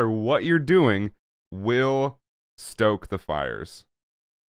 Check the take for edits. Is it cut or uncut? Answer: uncut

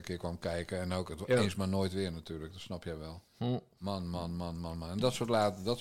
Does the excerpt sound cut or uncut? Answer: cut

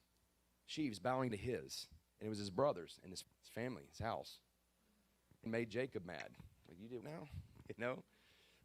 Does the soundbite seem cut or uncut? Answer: cut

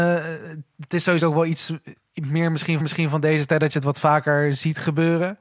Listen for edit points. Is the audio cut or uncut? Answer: cut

